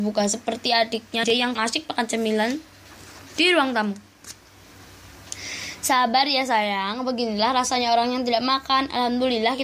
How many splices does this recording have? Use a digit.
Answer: 2